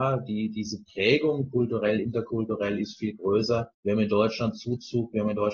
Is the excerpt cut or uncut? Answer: cut